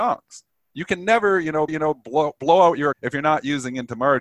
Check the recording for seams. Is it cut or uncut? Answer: cut